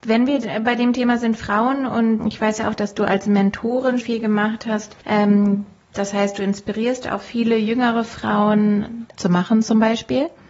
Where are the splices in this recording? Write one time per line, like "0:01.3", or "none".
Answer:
0:02.2
0:04.0
0:05.0
0:09.2